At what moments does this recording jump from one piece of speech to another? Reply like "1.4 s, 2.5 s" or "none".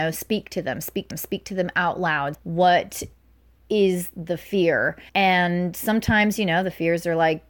1.1 s, 2.3 s, 5.1 s